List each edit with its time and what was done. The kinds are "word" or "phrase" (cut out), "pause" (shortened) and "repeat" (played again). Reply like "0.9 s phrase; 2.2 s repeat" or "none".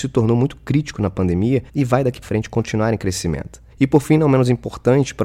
1.7 s pause; 2.2 s word; 3.7 s pause